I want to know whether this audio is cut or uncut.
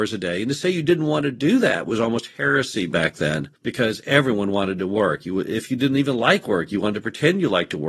cut